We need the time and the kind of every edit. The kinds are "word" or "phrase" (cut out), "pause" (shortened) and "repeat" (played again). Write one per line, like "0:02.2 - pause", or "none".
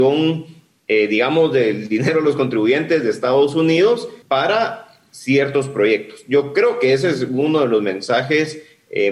0:04.2 - pause

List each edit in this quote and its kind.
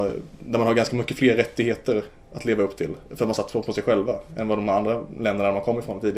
0:03.0 - pause

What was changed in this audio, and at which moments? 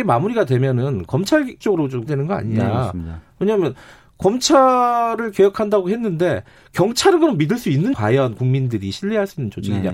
0:01.6 - word
0:02.1 - word
0:07.9 - word

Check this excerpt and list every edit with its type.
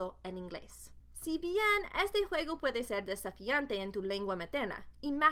none

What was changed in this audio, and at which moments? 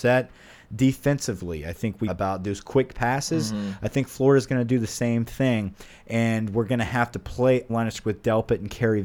0:02.1 - phrase
0:07.7 - phrase
0:08.0 - word

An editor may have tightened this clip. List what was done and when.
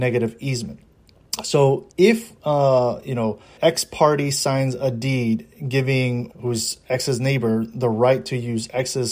0:01.9 - pause
0:03.6 - word
0:06.3 - word

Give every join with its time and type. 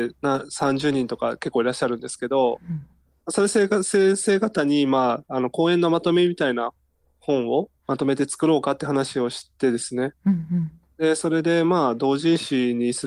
0:07.8 - pause

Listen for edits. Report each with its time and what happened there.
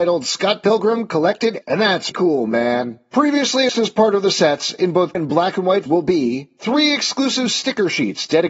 0:01.6 - word
0:02.1 - word
0:03.7 - word
0:05.1 - word
0:05.9 - word

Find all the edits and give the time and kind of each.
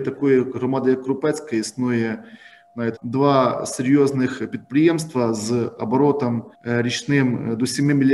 0:03.0 - word
0:06.5 - pause

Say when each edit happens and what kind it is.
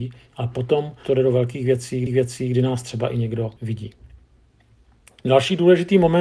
0:01.0 - word
0:02.1 - repeat
0:03.6 - pause

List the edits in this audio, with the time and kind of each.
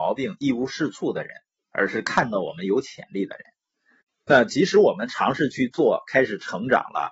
none

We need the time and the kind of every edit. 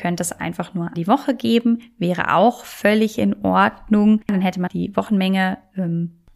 0:00.9 - word
0:04.7 - word

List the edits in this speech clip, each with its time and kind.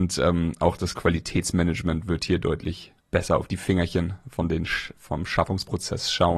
0:03.0 - pause

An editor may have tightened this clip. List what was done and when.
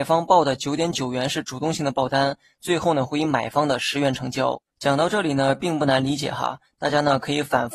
0:04.7 - pause

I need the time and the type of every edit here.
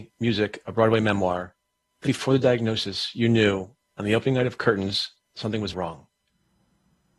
0:02.1 - word
0:05.7 - word

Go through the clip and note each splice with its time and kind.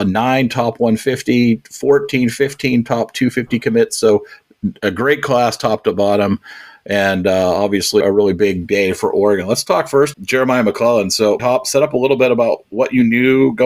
0:08.0 - word
0:10.1 - word
0:11.4 - word

